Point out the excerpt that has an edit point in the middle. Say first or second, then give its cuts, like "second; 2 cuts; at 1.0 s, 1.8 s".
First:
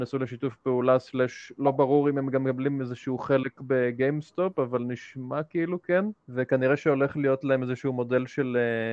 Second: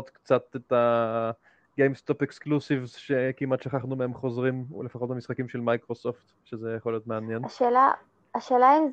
first; 1 cut; at 6.2 s